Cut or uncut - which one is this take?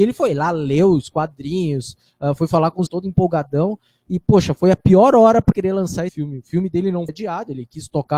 cut